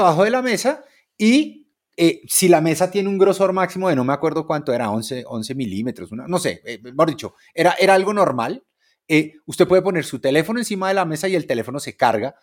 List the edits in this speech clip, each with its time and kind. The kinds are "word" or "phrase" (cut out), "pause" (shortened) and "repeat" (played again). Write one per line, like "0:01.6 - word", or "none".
none